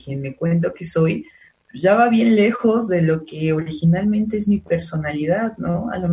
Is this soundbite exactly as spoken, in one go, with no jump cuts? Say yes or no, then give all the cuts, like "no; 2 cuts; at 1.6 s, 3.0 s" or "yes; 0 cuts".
yes; 0 cuts